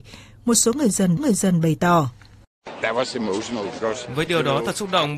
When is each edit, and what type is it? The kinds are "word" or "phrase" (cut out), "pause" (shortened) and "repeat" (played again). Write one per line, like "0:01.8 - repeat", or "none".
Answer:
0:01.2 - repeat
0:04.3 - word